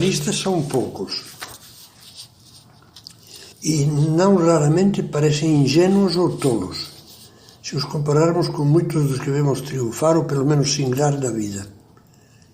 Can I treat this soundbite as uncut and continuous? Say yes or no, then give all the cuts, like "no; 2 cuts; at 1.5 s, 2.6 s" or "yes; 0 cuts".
no; 1 cut; at 3.5 s